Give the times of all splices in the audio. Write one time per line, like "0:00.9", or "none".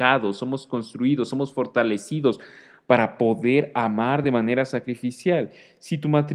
none